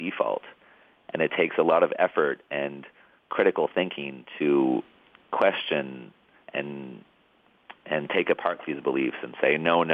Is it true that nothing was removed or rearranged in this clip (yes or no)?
yes